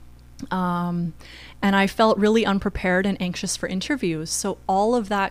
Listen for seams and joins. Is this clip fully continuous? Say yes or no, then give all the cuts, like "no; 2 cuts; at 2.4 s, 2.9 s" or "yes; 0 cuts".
yes; 0 cuts